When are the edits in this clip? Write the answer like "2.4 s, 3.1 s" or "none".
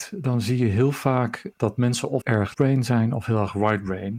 1.5 s, 2.2 s, 2.5 s